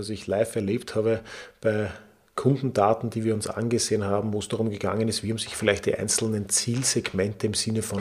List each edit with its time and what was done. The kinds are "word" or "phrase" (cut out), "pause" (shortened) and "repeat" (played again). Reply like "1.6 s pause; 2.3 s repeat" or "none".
none